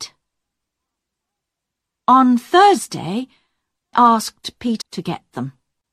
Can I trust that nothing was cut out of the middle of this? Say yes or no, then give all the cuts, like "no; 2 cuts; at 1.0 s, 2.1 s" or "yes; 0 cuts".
no; 2 cuts; at 3.9 s, 4.8 s